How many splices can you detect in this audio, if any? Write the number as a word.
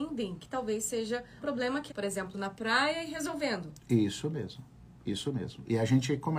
three